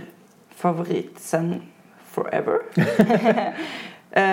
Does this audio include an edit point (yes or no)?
no